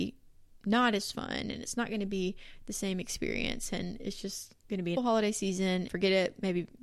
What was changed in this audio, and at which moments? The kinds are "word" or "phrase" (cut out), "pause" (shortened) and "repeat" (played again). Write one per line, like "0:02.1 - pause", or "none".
0:04.6 - pause
0:05.0 - word
0:05.9 - word